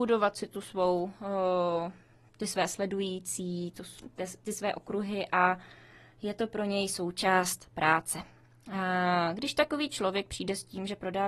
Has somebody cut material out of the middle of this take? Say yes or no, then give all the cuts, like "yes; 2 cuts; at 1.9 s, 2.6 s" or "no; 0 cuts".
no; 0 cuts